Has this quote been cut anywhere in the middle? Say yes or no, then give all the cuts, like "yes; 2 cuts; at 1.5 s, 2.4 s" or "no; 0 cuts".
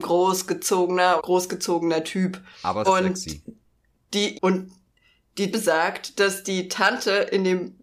yes; 4 cuts; at 1.2 s, 2.8 s, 4.3 s, 5.5 s